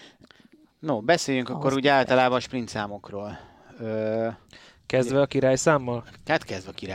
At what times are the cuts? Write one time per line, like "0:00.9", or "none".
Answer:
none